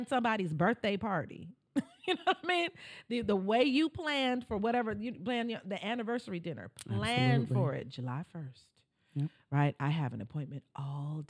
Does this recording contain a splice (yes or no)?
no